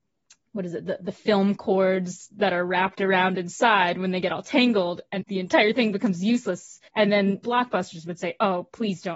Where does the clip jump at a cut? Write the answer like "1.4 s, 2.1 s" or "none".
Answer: 5.2 s, 6.9 s, 7.4 s